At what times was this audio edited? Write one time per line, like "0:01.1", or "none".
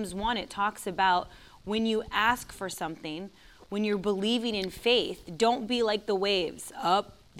none